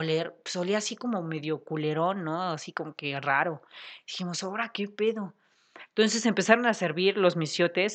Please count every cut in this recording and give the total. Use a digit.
0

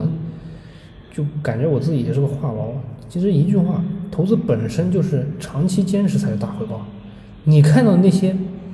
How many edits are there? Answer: 1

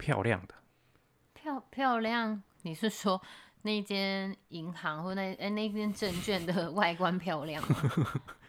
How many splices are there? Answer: 0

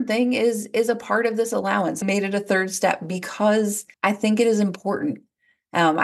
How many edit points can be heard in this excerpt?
2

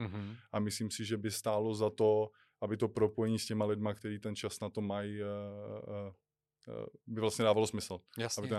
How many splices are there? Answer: 0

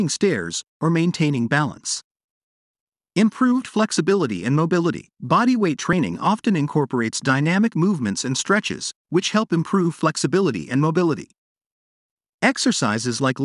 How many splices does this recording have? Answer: 1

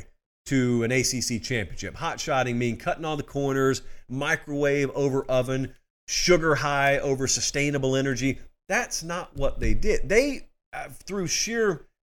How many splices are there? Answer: 0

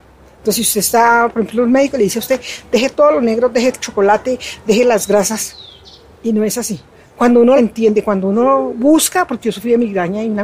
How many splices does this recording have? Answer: 3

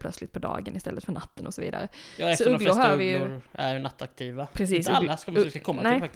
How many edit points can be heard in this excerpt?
0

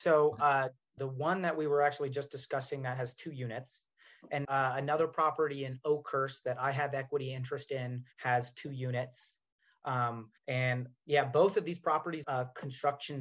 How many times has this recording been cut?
5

